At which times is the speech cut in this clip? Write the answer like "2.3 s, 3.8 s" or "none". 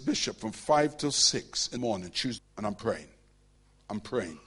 1.8 s, 2.4 s